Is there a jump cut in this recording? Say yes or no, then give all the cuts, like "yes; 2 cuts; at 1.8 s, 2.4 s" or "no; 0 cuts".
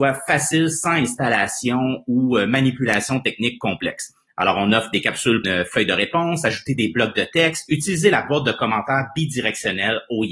yes; 1 cut; at 5.4 s